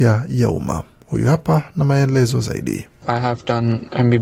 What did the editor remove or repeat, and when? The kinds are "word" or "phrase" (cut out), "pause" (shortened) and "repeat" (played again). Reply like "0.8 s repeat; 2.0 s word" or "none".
3.0 s pause